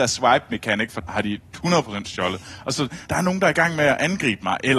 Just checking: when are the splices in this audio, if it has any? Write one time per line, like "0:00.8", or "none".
0:01.0
0:03.1